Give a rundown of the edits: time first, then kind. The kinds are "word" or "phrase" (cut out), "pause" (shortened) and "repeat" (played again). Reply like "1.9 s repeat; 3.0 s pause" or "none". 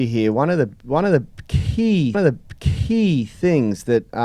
2.1 s repeat